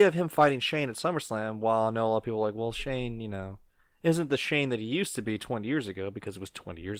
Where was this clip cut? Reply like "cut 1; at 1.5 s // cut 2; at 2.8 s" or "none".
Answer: none